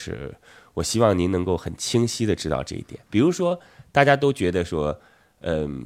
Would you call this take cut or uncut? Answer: cut